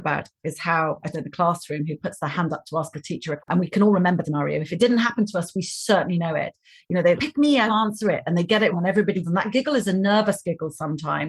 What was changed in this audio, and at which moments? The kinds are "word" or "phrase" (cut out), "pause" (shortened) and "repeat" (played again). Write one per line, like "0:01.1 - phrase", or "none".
0:01.1 - word
0:03.4 - word
0:04.2 - word
0:07.2 - word
0:07.7 - word
0:08.7 - word
0:09.2 - word